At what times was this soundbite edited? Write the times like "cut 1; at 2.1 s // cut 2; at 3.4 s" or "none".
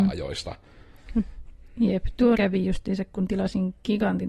cut 1; at 2.3 s

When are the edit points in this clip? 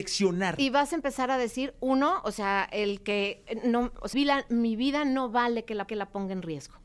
cut 1; at 4.1 s // cut 2; at 5.9 s

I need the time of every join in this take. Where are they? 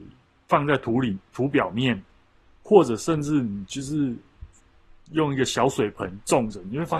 none

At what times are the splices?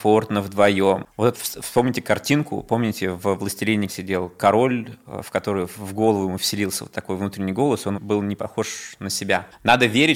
cut 1; at 1.3 s // cut 2; at 3.9 s // cut 3; at 7.9 s

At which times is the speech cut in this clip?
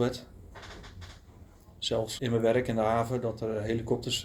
cut 1; at 2.2 s

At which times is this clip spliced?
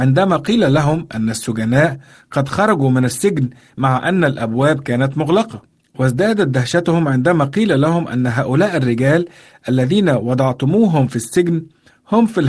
none

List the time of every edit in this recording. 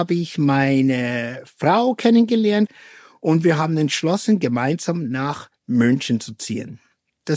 none

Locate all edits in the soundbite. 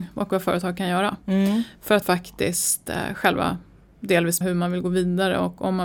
cut 1; at 2.0 s // cut 2; at 4.4 s

